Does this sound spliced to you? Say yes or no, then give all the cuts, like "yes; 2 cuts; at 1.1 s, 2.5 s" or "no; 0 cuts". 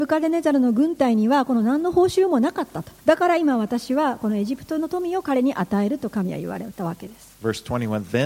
yes; 1 cut; at 3.0 s